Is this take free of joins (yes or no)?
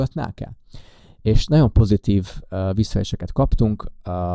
yes